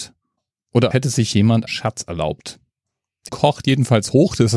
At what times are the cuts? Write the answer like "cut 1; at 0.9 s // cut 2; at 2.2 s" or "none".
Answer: cut 1; at 0.9 s // cut 2; at 1.7 s // cut 3; at 3.3 s